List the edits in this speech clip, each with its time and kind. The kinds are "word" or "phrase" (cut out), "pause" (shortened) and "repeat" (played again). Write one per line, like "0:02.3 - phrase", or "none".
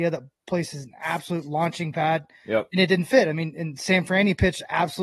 none